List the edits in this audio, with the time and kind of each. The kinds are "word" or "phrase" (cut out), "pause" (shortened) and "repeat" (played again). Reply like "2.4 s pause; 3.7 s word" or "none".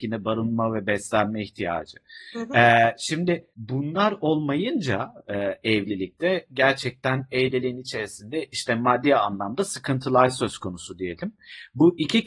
3.5 s pause